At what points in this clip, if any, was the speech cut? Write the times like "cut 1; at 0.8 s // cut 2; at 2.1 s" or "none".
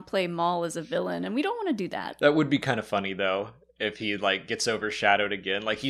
none